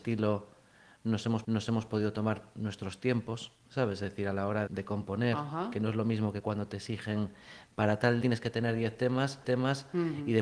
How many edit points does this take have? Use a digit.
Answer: 4